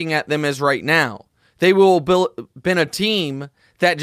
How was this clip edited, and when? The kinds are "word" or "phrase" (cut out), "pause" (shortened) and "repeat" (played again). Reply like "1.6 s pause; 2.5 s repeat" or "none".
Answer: none